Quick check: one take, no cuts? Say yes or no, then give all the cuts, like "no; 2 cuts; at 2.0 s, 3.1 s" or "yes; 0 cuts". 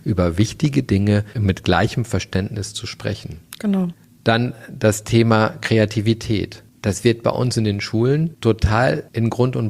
yes; 0 cuts